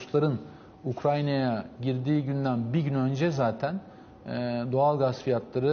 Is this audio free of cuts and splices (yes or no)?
yes